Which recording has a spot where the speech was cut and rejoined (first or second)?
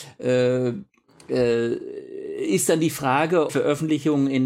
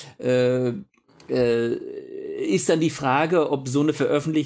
first